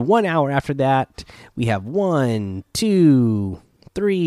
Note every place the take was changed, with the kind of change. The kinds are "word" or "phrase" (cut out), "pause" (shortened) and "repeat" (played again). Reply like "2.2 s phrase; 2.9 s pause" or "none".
none